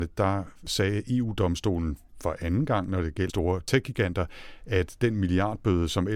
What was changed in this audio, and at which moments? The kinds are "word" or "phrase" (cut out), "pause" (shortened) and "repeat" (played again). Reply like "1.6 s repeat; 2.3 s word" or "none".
3.3 s phrase